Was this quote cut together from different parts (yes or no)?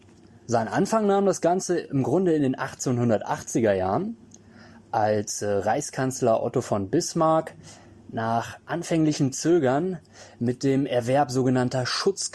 no